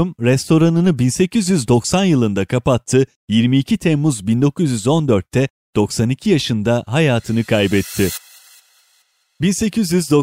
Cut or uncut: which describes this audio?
uncut